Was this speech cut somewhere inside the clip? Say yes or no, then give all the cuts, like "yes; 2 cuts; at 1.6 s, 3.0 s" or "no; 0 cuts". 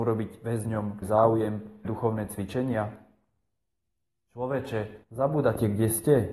yes; 3 cuts; at 1.0 s, 1.8 s, 5.0 s